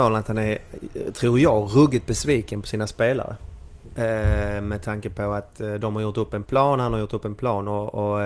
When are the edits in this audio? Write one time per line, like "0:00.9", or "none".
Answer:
none